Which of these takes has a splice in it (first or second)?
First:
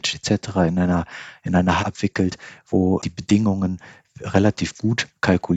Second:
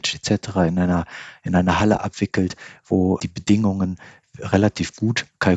first